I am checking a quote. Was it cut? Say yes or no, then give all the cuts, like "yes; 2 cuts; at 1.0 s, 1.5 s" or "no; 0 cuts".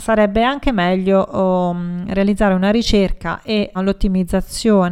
yes; 1 cut; at 3.7 s